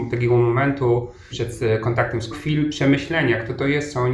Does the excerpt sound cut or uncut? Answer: cut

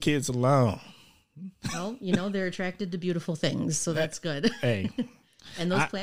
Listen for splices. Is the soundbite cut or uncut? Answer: uncut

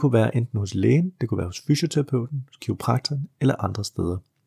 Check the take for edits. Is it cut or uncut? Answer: uncut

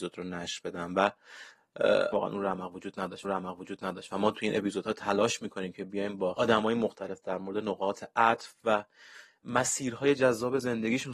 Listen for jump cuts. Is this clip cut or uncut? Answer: cut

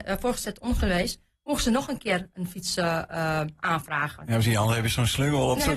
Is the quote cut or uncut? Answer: uncut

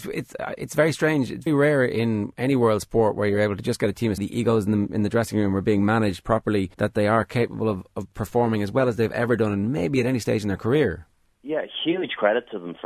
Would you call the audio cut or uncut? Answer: cut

